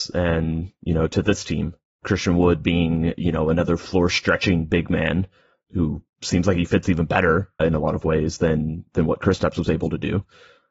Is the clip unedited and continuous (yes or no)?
no